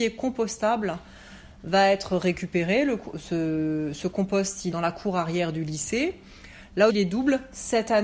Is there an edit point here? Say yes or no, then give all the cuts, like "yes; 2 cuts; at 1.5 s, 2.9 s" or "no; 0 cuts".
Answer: yes; 2 cuts; at 4.7 s, 6.9 s